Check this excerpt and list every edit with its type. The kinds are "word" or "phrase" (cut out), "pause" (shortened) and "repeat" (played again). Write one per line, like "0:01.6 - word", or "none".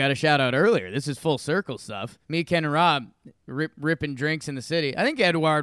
0:02.2 - pause